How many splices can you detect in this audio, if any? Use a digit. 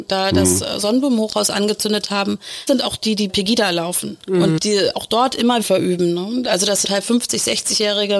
5